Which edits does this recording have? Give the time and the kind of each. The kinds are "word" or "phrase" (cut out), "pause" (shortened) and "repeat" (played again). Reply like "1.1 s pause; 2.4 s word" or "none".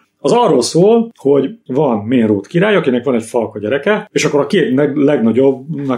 none